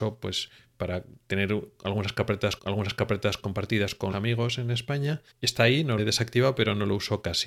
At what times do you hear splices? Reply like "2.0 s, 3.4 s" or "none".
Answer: 2.6 s, 4.1 s, 5.3 s, 6.0 s